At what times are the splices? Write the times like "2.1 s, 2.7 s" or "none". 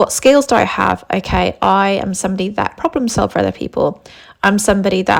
2.8 s

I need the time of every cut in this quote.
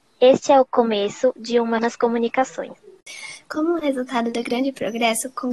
1.8 s

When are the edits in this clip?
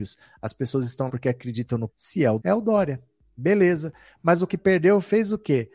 1.1 s, 1.9 s, 2.4 s, 4.5 s

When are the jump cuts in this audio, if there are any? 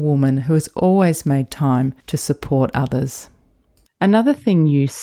2.0 s

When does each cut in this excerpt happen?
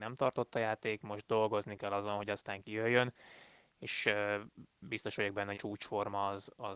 5.5 s

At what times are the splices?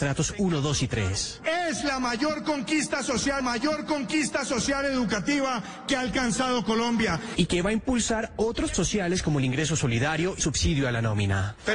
3.4 s, 8.7 s, 10.4 s

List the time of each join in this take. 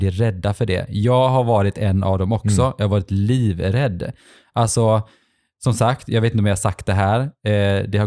none

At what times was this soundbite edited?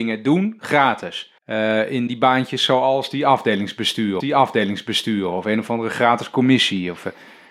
1.4 s, 2.1 s, 4.2 s

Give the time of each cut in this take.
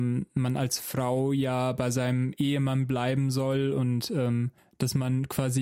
4.6 s

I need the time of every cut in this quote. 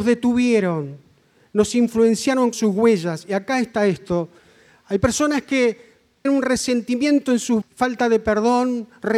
2.5 s, 6.2 s, 7.6 s

